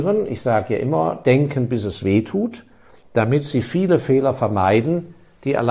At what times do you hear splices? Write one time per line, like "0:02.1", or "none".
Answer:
none